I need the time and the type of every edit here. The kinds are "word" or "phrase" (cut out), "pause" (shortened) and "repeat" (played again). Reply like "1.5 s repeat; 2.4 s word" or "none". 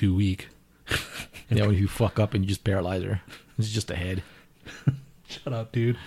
1.4 s pause